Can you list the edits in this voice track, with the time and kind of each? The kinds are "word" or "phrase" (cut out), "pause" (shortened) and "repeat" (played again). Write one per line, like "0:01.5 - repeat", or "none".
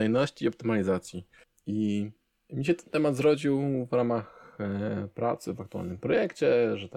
none